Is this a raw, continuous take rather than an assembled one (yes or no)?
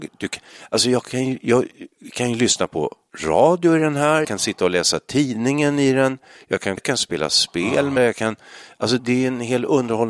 no